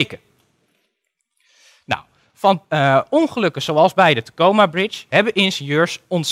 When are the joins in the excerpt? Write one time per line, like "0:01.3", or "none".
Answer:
0:02.6